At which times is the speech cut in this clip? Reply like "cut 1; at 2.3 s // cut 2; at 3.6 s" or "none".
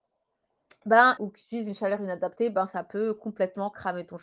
cut 1; at 1.2 s